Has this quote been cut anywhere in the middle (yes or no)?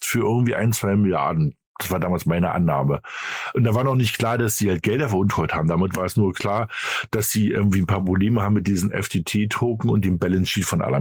no